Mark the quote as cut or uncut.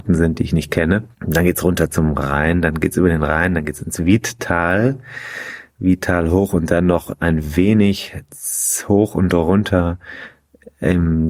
cut